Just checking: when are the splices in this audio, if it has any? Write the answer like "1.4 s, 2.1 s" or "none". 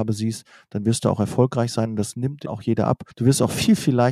2.4 s, 3.1 s